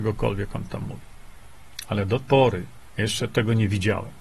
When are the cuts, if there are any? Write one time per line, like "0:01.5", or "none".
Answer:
0:02.2
0:02.9